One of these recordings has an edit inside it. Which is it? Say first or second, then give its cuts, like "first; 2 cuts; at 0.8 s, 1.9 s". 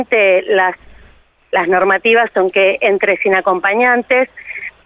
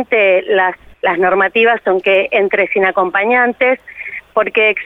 second; 1 cut; at 0.9 s